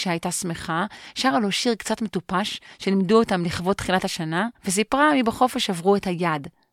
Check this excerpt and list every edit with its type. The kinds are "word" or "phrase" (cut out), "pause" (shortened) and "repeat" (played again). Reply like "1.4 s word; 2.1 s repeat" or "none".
4.6 s pause

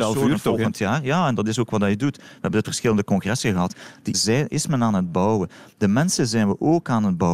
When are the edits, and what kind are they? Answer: 2.6 s phrase; 4.1 s word

